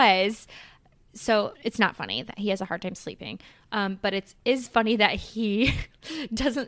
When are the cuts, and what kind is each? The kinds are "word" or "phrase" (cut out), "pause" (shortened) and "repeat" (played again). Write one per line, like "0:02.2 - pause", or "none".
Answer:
0:01.5 - phrase